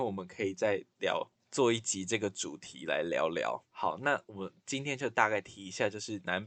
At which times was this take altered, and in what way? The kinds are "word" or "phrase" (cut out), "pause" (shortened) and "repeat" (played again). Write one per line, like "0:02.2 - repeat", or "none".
0:01.4 - pause
0:03.7 - pause